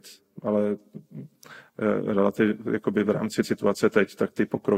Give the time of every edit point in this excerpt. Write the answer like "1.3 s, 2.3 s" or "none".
3.4 s